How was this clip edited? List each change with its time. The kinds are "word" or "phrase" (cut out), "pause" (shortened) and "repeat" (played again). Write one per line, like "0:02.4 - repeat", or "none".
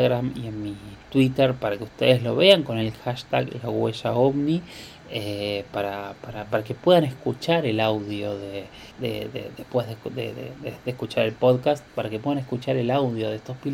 0:01.0 - pause
0:08.9 - pause